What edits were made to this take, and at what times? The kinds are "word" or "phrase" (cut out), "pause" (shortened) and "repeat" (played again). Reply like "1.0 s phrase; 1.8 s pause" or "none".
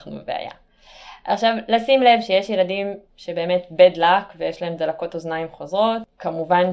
none